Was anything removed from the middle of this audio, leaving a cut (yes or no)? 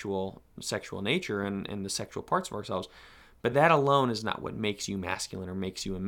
no